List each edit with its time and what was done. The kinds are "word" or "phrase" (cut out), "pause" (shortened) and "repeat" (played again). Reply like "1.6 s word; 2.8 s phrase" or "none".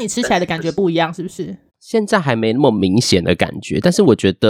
1.7 s pause